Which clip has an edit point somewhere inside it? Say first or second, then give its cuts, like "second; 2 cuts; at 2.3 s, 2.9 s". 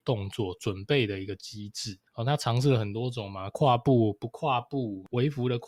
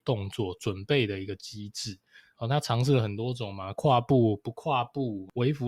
first; 1 cut; at 2.1 s